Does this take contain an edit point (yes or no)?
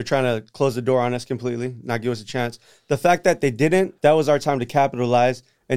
yes